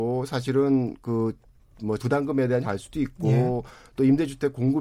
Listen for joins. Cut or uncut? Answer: cut